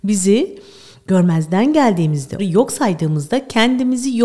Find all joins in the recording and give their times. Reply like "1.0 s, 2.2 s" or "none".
2.4 s